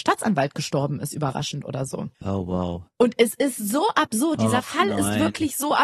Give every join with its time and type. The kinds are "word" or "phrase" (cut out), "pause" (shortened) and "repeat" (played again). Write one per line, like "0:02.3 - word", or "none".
0:02.1 - pause